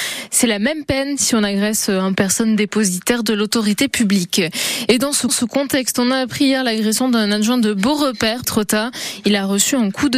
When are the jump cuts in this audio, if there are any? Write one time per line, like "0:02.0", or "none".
0:02.2
0:05.3
0:08.4